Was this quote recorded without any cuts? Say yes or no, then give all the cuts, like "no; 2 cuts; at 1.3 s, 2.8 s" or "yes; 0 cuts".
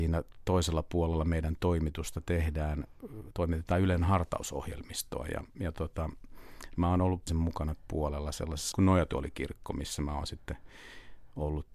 no; 3 cuts; at 7.3 s, 7.9 s, 8.7 s